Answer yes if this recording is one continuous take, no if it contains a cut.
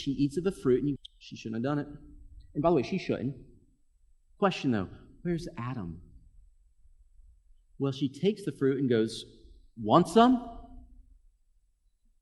no